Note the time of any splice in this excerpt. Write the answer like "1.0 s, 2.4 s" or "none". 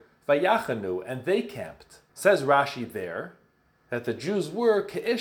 2.1 s

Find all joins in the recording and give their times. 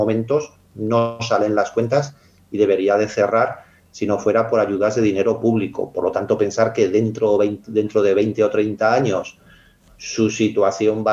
none

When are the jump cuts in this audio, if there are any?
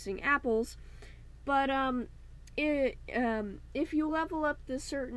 none

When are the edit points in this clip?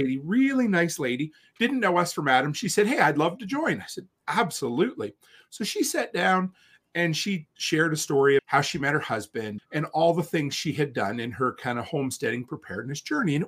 4.2 s, 8.4 s, 9.6 s

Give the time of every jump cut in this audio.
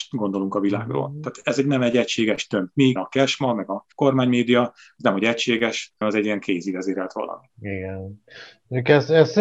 3.0 s, 3.9 s, 6.0 s, 7.5 s

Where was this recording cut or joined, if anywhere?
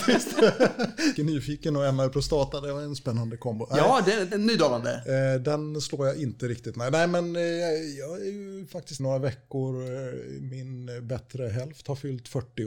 1.2 s, 4.3 s, 9.0 s

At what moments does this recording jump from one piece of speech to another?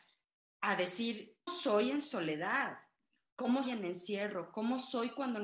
1.5 s, 3.6 s

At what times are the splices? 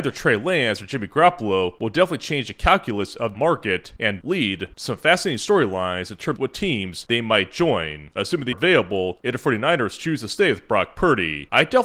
3.3 s, 4.2 s, 6.4 s, 8.5 s

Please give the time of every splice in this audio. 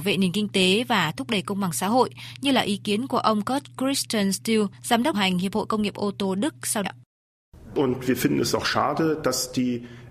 4.7 s, 5.1 s, 6.8 s

